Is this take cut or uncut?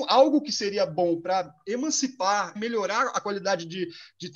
cut